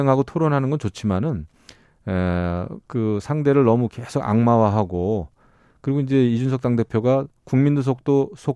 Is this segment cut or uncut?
uncut